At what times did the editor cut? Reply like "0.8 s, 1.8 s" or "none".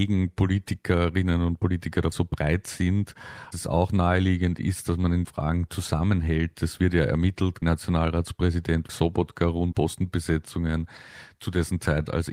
2.1 s, 3.5 s, 5.2 s, 7.6 s, 8.9 s, 9.7 s